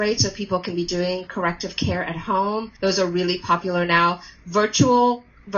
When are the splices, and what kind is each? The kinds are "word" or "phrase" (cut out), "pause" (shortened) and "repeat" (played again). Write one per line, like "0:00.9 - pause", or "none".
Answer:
0:02.8 - pause